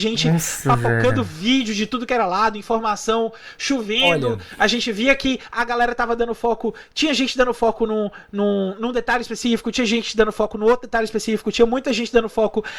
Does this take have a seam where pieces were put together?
no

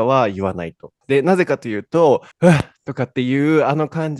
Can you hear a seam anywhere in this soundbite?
yes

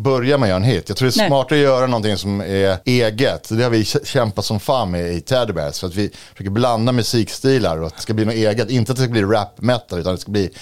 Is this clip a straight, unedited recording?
no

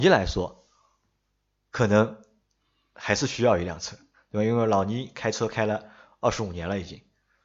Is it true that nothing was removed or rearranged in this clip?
yes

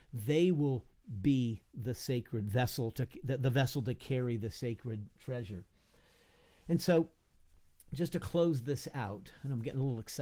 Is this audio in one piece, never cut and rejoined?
yes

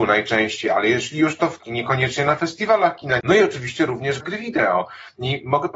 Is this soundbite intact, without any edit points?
no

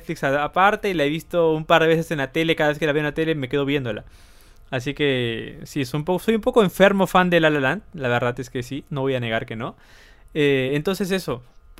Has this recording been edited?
no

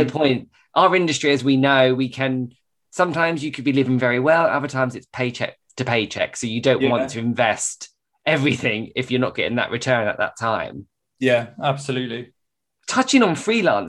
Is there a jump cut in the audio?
no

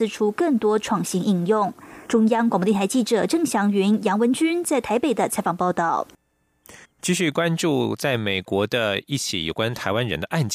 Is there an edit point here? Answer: yes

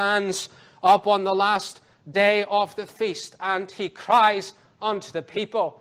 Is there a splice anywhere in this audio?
no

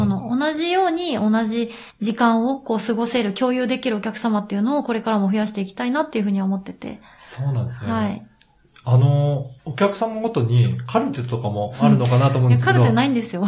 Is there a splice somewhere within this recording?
yes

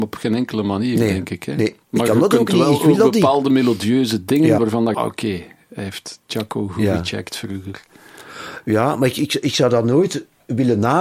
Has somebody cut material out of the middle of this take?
yes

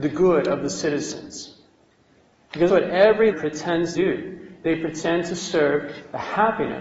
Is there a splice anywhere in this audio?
yes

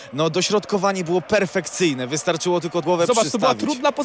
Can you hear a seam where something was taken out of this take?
yes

